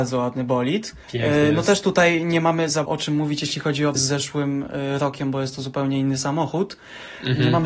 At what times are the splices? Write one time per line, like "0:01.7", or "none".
0:01.0
0:02.9
0:04.0